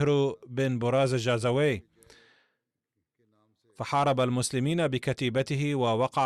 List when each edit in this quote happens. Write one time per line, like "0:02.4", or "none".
none